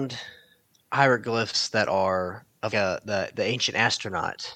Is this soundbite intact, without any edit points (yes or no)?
no